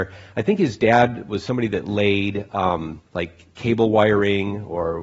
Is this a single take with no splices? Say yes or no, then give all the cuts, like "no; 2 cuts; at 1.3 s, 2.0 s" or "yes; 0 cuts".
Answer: no; 1 cut; at 3.1 s